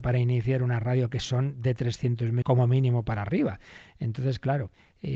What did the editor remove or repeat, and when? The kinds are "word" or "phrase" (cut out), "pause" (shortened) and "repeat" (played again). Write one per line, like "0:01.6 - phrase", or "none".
0:02.4 - word